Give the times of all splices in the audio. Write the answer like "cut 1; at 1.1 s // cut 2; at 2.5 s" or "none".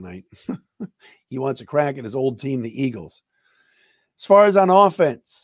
none